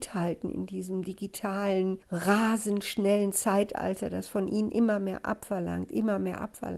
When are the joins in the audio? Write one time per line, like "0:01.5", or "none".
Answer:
0:02.0

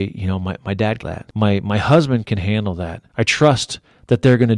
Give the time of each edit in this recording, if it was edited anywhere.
0:01.0

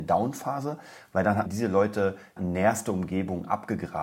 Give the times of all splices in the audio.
0:01.5
0:02.4

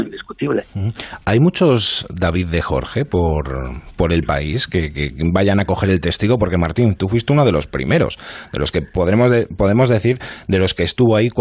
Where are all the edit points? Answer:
none

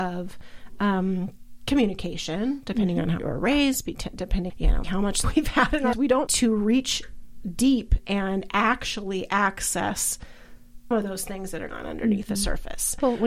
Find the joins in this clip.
0:03.2
0:04.5
0:04.8
0:05.2
0:05.9
0:06.3
0:08.0
0:10.9
0:11.7

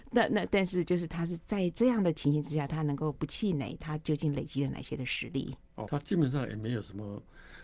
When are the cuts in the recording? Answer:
0:05.9

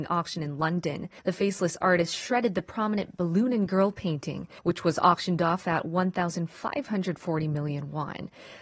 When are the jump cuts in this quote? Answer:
0:01.2
0:04.6

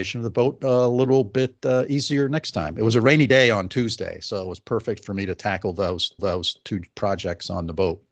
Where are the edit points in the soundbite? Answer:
0:06.2

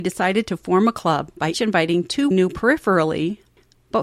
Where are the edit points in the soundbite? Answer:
0:01.5
0:02.3

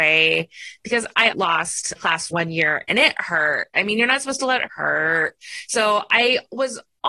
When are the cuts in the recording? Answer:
0:01.3
0:02.0
0:02.3
0:04.7

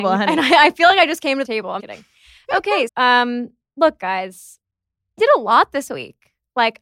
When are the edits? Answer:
0:01.4
0:01.8
0:02.9
0:05.2

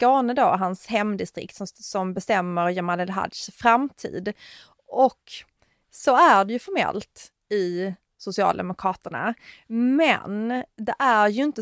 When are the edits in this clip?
none

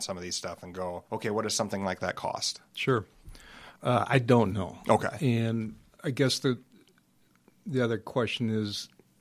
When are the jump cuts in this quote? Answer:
0:01.1
0:03.8
0:06.0

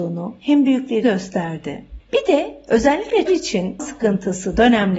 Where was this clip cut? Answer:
0:01.0
0:02.0
0:03.3
0:03.8

